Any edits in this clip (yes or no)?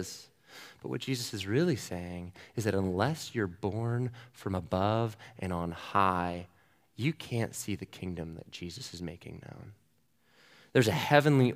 no